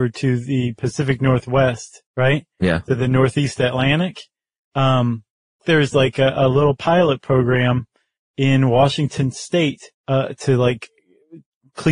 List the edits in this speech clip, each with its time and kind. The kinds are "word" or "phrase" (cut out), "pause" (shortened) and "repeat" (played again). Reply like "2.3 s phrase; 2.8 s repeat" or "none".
2.1 s pause; 5.6 s phrase; 9.9 s pause